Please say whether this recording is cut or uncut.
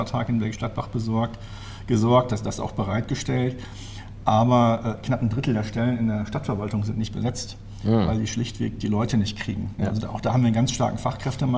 uncut